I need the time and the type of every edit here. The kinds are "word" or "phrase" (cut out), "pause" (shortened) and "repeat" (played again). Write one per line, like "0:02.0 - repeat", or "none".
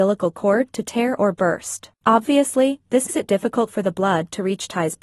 0:01.9 - pause
0:03.1 - word